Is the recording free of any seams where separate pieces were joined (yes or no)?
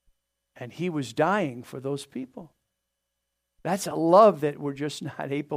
yes